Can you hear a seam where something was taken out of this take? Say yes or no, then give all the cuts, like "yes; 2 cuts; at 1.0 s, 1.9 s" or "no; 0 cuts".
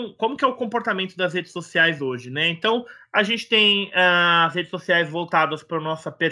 no; 0 cuts